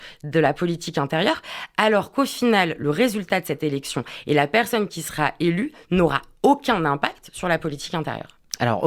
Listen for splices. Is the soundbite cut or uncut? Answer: uncut